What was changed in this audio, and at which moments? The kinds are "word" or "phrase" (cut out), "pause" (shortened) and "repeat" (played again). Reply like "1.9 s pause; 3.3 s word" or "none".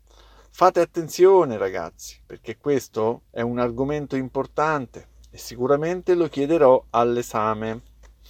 2.2 s pause